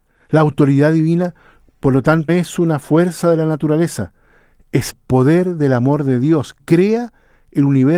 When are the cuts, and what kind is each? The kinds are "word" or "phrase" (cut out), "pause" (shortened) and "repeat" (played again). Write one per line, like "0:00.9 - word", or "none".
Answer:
0:02.3 - word
0:04.9 - word
0:06.6 - word